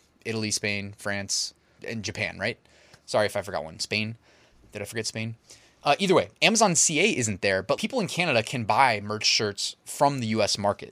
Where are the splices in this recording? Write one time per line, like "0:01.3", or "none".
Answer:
0:01.8
0:07.8